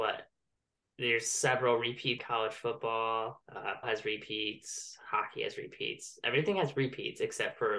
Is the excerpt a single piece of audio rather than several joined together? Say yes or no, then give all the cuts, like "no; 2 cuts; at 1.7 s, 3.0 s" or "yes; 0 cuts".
no; 2 cuts; at 2.2 s, 3.8 s